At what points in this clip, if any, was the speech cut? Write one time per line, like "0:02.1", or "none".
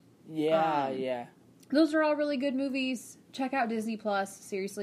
0:03.2